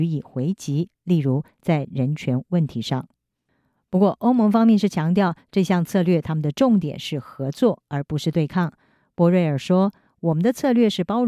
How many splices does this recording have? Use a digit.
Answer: 0